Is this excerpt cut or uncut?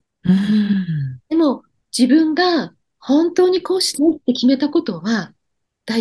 cut